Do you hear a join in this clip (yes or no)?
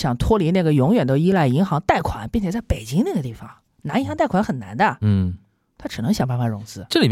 no